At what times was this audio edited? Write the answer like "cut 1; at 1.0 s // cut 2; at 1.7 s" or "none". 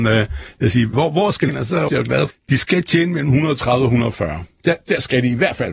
cut 1; at 0.9 s // cut 2; at 1.5 s // cut 3; at 1.9 s // cut 4; at 2.3 s